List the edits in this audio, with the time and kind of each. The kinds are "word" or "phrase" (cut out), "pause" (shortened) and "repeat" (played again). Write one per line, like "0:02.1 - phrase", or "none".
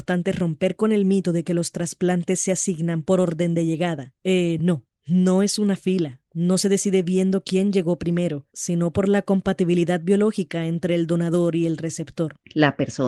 none